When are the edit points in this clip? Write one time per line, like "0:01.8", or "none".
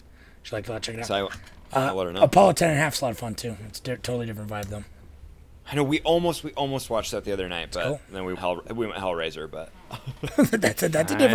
0:08.4